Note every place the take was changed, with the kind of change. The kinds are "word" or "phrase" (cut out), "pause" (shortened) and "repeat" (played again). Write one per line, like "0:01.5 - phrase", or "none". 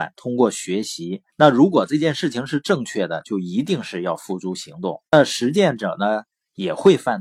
0:01.3 - pause
0:05.1 - pause